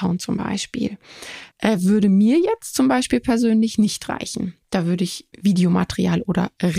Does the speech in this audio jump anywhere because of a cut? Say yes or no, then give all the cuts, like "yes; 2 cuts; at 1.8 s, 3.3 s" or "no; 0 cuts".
yes; 2 cuts; at 1.5 s, 5.3 s